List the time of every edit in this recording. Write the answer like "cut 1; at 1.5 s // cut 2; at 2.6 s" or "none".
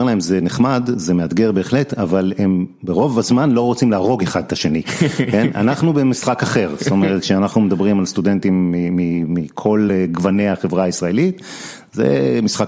none

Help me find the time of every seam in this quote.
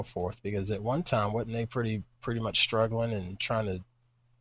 none

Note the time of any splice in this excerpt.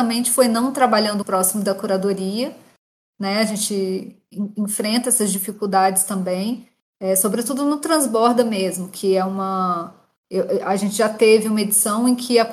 cut 1; at 1.2 s

